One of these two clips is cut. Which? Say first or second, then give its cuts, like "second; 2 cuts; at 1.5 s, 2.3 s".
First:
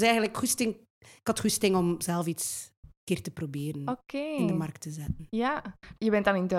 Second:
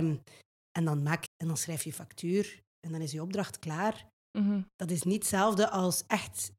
second; 1 cut; at 1.3 s